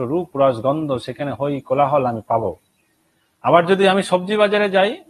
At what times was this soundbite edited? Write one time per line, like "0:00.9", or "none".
none